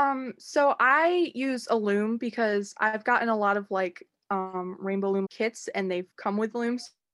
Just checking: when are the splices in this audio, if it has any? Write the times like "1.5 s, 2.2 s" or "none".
5.2 s